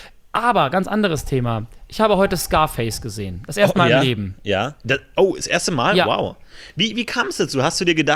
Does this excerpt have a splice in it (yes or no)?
yes